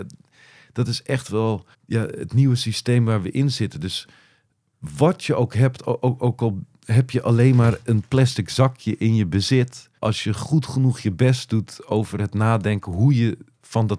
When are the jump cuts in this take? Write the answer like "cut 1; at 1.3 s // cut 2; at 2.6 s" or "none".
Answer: cut 1; at 1.7 s // cut 2; at 10.0 s